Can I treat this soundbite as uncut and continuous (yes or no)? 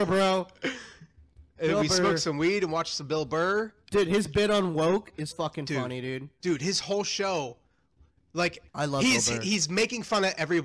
no